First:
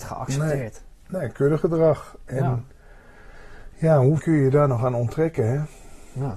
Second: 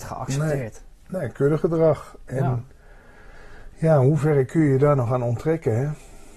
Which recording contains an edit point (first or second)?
first